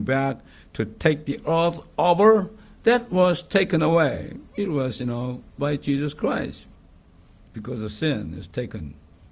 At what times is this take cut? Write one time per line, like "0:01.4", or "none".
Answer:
0:05.6